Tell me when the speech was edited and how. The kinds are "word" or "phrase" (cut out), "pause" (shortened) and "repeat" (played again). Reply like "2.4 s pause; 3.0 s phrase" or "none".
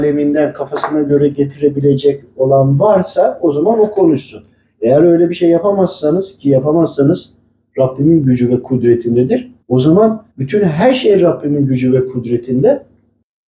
9.6 s pause; 10.3 s pause